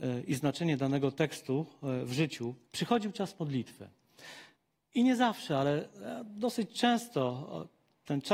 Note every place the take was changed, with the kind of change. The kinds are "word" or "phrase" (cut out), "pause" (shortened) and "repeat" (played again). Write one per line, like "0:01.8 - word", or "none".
0:02.6 - pause
0:04.6 - pause